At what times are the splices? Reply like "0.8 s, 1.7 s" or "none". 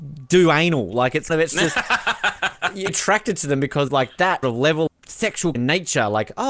1.3 s, 2.9 s, 3.9 s, 4.4 s, 4.9 s, 5.6 s